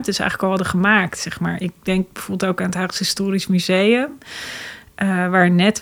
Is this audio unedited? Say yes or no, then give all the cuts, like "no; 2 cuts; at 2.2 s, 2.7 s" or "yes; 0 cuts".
yes; 0 cuts